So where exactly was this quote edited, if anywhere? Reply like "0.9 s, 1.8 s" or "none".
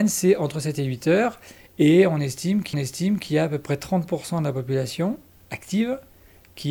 2.7 s